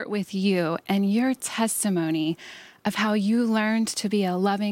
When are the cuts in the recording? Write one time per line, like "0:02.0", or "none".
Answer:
none